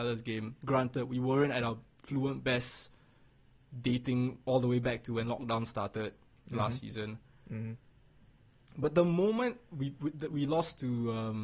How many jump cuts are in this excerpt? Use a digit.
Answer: 0